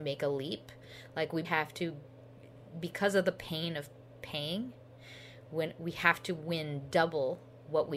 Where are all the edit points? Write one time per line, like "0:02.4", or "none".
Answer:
0:01.4